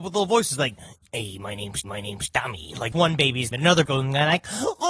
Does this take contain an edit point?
yes; 4 cuts; at 1.8 s, 2.9 s, 3.5 s, 3.9 s

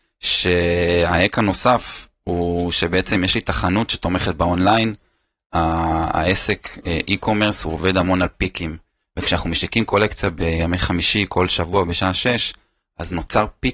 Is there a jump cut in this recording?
no; 0 cuts

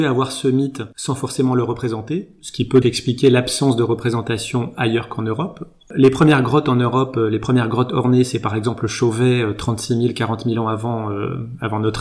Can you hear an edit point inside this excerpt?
yes; 2 cuts; at 0.9 s, 2.8 s

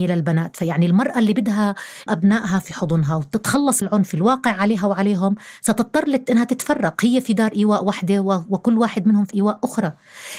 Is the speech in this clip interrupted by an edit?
yes; 3 cuts; at 2.1 s, 3.8 s, 9.3 s

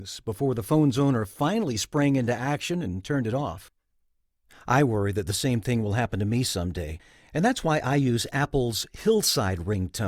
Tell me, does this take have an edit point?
no; 0 cuts

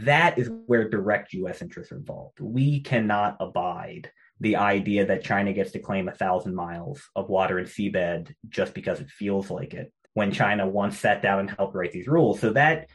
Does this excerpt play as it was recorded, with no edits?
no; 2 cuts; at 4.3 s, 10.0 s

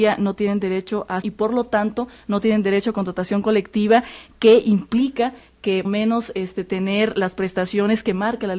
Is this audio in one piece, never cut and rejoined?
no; 2 cuts; at 1.2 s, 5.8 s

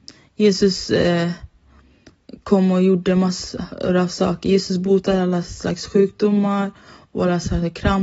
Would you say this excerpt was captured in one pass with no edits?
yes; 0 cuts

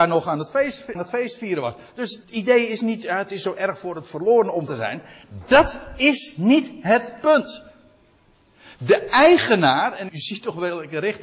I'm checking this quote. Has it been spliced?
yes; 4 cuts; at 0.9 s, 2.2 s, 4.7 s, 10.1 s

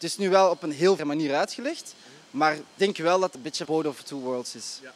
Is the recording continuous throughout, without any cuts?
no; 5 cuts; at 1.0 s, 2.8 s, 3.3 s, 3.6 s, 4.0 s

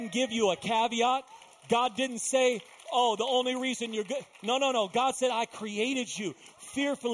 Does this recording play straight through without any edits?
yes; 0 cuts

